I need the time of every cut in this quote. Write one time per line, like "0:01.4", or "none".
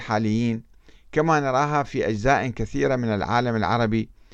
none

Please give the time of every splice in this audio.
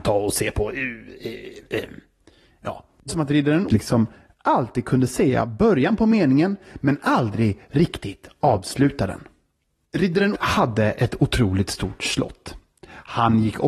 0:03.1
0:03.7
0:10.3

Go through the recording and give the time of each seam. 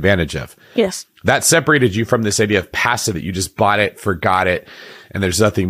0:03.1

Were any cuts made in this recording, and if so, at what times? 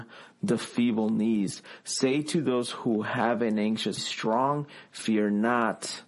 0:04.0

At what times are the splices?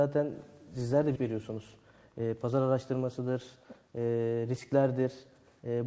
0:01.2

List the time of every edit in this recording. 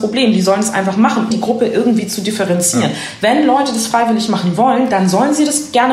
0:01.3

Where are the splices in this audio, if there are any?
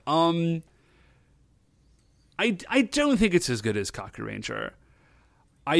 none

